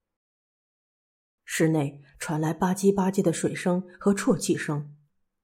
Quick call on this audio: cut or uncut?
uncut